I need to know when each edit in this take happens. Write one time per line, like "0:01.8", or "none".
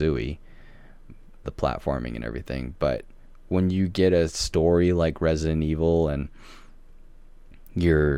0:01.4